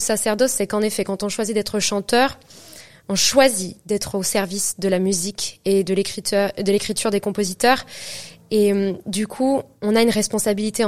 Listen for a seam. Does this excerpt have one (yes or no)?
no